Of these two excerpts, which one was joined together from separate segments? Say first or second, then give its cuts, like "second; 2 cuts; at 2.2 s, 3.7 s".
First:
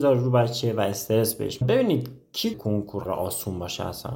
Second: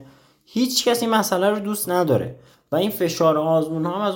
first; 3 cuts; at 1.6 s, 2.5 s, 3.1 s